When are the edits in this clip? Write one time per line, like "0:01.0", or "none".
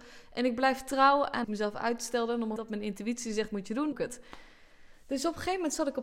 0:01.4
0:02.6
0:03.5
0:03.9